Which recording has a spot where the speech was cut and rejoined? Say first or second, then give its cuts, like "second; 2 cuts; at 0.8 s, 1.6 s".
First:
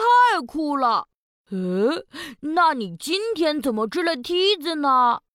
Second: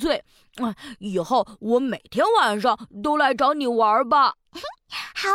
second; 1 cut; at 4.4 s